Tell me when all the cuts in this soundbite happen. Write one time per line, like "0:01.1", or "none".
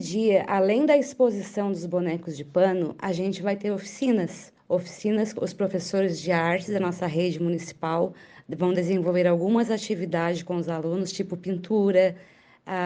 none